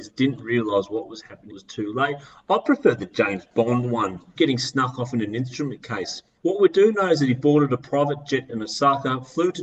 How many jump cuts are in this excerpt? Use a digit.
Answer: 3